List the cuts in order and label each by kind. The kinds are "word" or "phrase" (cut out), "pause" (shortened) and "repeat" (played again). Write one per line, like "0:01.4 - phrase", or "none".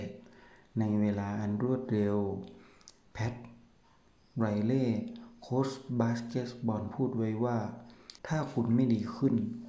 0:08.2 - pause